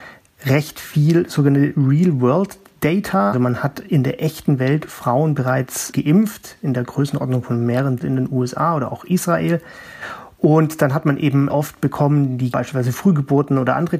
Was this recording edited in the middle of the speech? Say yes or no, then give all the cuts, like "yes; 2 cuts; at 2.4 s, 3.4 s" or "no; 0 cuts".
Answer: yes; 4 cuts; at 3.3 s, 8.0 s, 11.5 s, 12.5 s